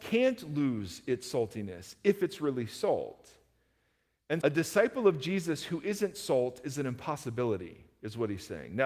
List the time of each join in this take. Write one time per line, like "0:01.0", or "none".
0:04.4